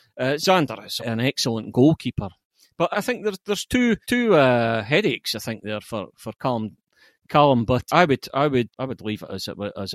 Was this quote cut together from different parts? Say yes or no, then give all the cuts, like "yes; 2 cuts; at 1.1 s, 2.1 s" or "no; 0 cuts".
yes; 6 cuts; at 1.0 s, 2.9 s, 4.0 s, 5.8 s, 7.9 s, 8.7 s